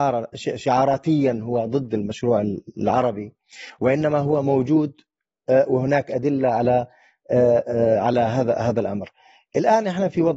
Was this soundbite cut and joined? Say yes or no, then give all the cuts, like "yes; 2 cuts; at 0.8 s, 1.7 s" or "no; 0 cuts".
no; 0 cuts